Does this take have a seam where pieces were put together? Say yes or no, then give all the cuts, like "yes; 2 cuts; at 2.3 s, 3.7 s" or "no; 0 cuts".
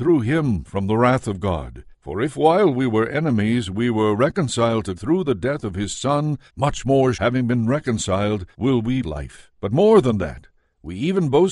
yes; 7 cuts; at 1.9 s, 5.0 s, 6.5 s, 7.1 s, 8.5 s, 9.0 s, 9.6 s